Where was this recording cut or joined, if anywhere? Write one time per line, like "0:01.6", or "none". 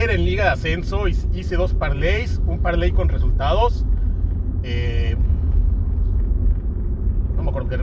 none